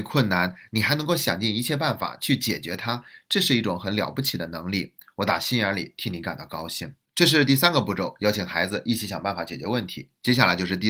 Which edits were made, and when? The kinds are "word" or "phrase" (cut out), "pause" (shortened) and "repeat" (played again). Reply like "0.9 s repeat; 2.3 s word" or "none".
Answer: 7.1 s pause